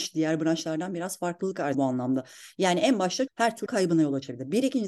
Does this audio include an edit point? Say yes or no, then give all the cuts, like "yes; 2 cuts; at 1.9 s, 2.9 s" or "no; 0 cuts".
yes; 3 cuts; at 1.7 s, 3.3 s, 3.7 s